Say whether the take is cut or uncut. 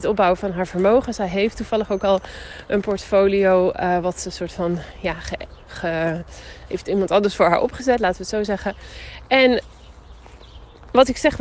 uncut